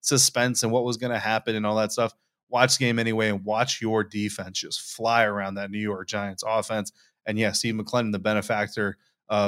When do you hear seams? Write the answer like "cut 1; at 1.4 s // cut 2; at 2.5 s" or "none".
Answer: none